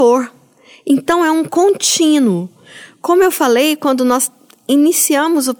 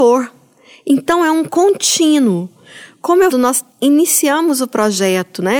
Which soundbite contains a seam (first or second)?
second